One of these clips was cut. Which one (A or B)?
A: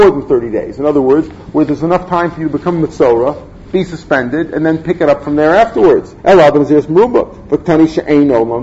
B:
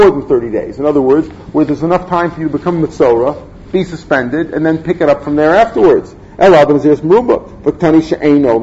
A